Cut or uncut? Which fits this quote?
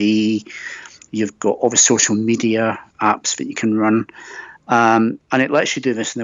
cut